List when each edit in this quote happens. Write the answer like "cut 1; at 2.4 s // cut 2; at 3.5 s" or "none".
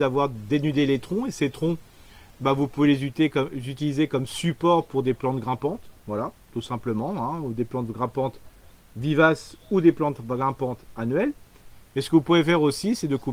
none